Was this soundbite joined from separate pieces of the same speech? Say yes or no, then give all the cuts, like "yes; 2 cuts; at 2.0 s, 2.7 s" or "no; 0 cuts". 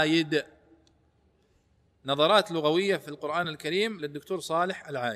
no; 0 cuts